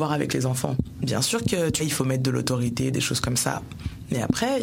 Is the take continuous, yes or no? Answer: no